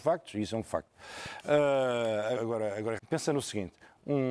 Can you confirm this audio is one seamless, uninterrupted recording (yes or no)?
no